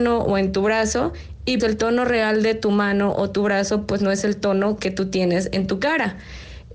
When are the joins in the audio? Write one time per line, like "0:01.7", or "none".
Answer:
0:01.6